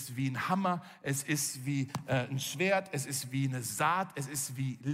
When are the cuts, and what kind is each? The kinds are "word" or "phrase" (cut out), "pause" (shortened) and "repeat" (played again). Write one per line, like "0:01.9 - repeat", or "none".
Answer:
none